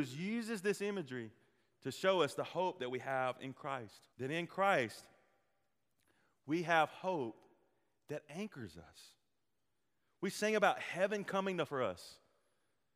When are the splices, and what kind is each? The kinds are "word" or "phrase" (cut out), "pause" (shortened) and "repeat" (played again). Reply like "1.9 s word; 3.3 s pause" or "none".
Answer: 4.1 s pause; 11.7 s word